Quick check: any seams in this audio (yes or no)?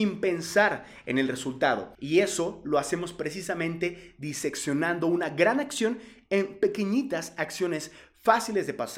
no